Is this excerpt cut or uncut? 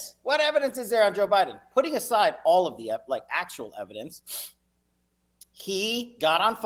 uncut